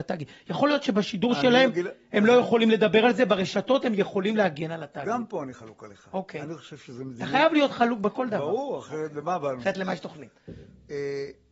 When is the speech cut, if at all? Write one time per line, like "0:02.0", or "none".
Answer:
none